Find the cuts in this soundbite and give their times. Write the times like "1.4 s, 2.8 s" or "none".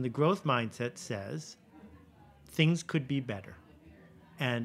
none